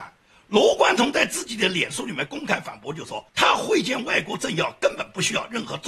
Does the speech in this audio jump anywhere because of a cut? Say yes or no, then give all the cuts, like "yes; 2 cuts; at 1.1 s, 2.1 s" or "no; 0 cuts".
yes; 1 cut; at 3.3 s